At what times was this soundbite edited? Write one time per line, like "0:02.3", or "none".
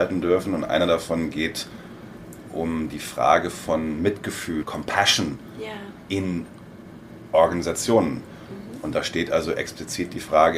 0:04.6